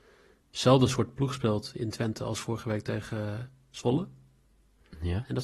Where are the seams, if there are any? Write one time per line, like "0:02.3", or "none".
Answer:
none